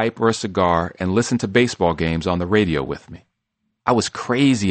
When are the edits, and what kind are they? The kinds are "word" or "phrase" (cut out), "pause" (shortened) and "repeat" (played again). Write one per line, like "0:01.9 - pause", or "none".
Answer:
none